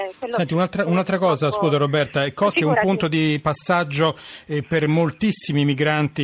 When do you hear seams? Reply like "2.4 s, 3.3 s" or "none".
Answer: 2.5 s